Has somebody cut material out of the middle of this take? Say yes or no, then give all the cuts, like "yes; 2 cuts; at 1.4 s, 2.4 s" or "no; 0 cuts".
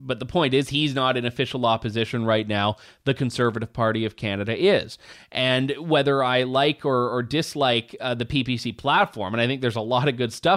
no; 0 cuts